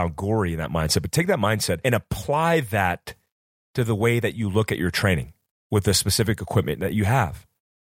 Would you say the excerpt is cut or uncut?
uncut